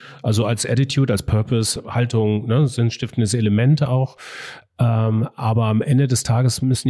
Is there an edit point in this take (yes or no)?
no